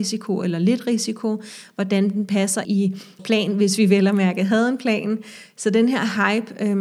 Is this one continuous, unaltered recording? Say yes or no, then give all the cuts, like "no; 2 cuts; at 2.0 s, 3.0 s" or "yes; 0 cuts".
no; 2 cuts; at 2.6 s, 3.2 s